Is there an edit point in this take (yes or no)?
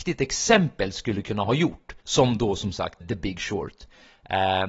yes